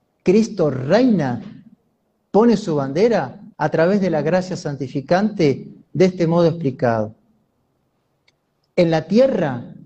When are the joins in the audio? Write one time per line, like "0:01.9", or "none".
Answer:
0:03.5

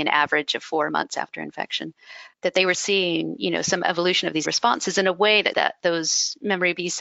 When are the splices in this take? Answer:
0:02.3
0:02.7
0:04.4
0:05.5

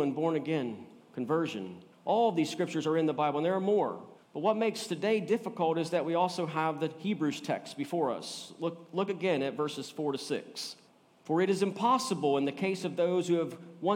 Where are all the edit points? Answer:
0:01.9
0:04.2
0:10.9

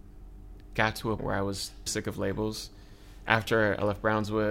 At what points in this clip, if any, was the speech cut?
0:01.2
0:01.9

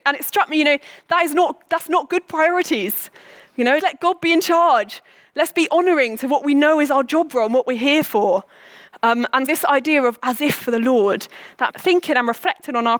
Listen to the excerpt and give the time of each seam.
0:03.8
0:09.5
0:10.6
0:11.7

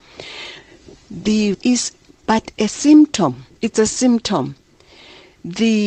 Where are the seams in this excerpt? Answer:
0:01.5
0:03.5

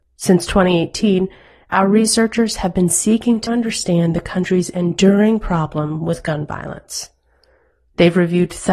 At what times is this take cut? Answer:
0:03.5

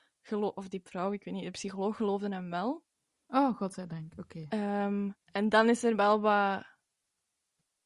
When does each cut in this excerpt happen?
0:05.2

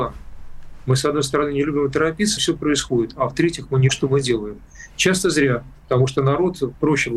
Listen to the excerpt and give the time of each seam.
0:02.4
0:03.9
0:05.8

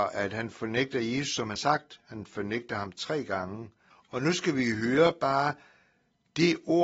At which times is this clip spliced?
0:01.5
0:03.9

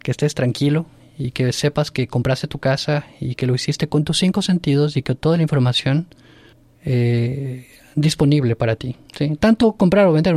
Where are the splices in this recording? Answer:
0:06.5
0:09.1

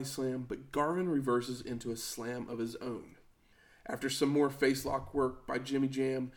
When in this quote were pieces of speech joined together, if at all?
none

